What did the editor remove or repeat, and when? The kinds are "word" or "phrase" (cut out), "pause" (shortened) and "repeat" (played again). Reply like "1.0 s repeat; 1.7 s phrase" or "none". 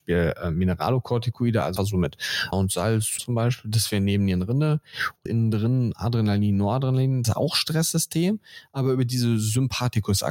1.8 s word; 2.5 s word; 3.2 s phrase; 5.3 s phrase; 7.2 s word